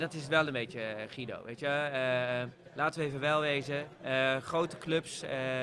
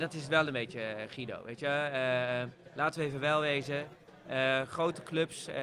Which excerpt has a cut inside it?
first; 1 cut; at 4.0 s

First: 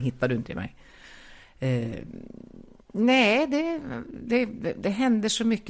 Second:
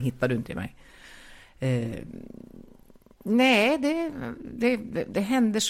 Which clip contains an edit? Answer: first; 1 cut; at 2.8 s

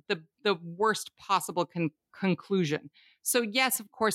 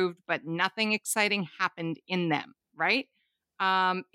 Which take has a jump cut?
second; 1 cut; at 2.6 s

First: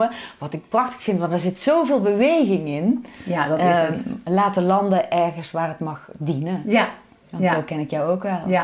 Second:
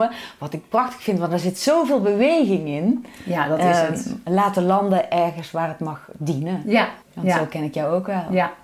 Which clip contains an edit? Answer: second; 1 cut; at 7.0 s

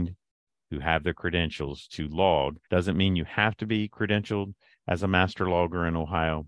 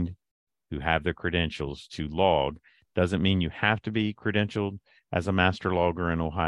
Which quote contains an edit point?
first; 1 cut; at 2.6 s

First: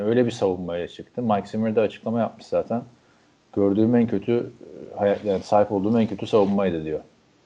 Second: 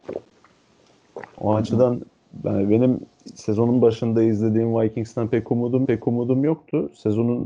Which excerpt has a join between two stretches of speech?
second; 1 cut; at 5.9 s

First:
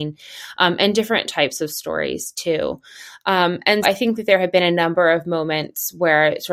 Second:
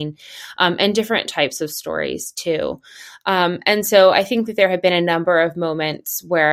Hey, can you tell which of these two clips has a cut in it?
first; 1 cut; at 3.8 s

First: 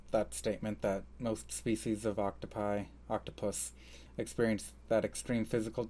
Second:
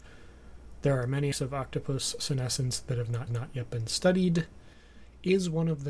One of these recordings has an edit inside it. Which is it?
second; 2 cuts; at 1.3 s, 3.3 s

